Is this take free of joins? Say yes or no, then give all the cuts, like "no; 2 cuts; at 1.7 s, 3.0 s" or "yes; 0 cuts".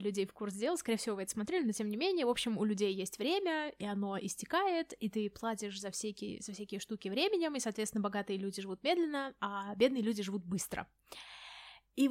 yes; 0 cuts